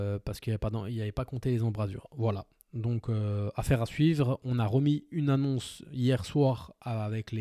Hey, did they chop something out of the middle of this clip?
no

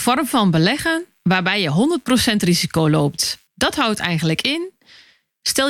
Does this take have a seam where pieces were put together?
yes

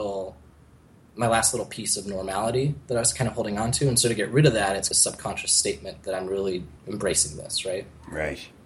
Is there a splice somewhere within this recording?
yes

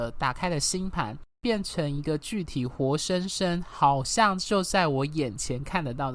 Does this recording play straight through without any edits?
no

